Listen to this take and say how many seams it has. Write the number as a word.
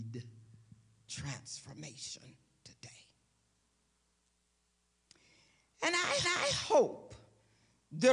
two